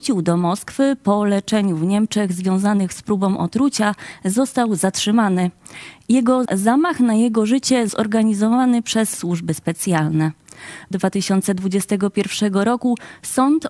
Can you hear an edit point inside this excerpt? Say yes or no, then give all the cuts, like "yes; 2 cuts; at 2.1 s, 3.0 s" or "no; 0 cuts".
yes; 4 cuts; at 6.4 s, 7.9 s, 9.1 s, 10.9 s